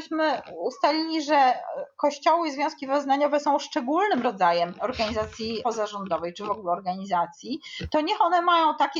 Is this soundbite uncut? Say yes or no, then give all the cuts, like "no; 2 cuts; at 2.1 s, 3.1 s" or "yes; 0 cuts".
yes; 0 cuts